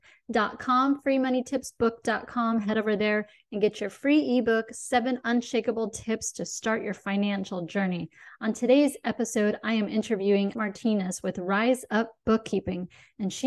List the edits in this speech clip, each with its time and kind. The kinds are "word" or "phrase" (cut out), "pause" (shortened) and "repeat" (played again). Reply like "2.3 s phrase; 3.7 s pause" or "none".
10.5 s word